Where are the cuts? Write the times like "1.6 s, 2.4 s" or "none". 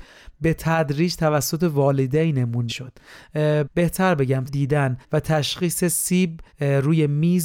2.7 s, 4.5 s, 5.0 s, 6.5 s